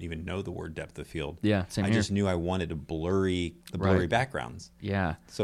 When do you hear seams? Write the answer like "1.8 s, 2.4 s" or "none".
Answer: 3.6 s